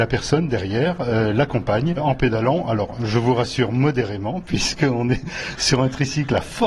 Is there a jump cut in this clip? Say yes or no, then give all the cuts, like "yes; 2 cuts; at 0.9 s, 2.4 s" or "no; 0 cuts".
no; 0 cuts